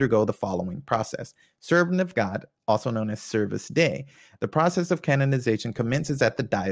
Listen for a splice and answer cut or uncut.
uncut